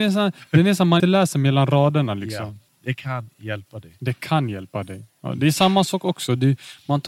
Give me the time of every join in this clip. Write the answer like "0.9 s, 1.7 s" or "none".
1.0 s, 2.7 s